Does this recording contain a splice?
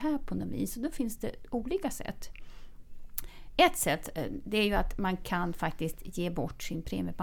no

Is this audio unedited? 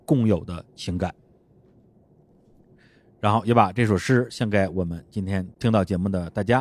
yes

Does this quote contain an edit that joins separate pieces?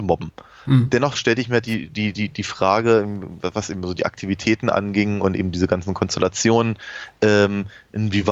no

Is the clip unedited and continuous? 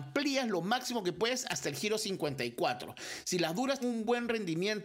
no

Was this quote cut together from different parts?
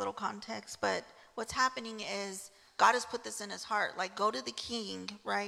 no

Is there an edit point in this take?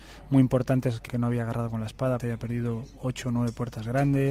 yes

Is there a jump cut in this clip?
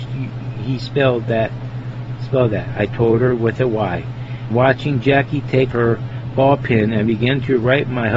yes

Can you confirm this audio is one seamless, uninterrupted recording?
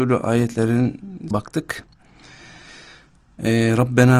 no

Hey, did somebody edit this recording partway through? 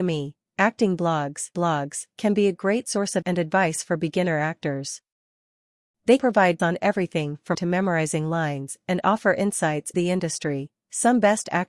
yes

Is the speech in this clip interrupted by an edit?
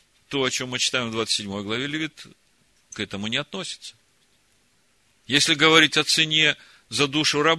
no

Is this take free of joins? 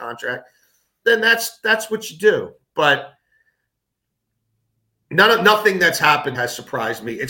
no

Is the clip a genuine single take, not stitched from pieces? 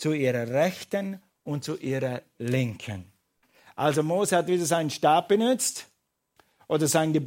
yes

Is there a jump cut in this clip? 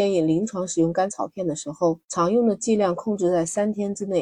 yes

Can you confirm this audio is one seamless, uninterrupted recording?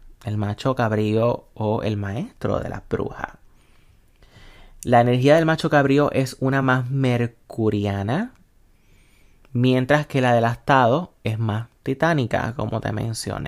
yes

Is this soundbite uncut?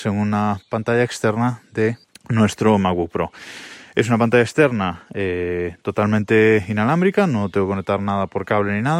no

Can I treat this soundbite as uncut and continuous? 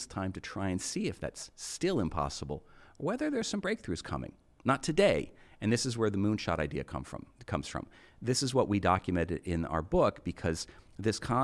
yes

